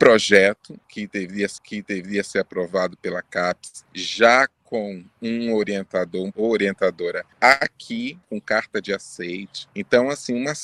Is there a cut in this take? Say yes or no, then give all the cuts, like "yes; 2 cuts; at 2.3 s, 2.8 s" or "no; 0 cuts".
yes; 3 cuts; at 1.6 s, 6.3 s, 8.2 s